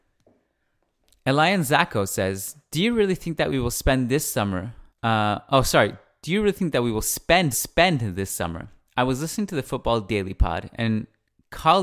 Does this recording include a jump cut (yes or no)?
yes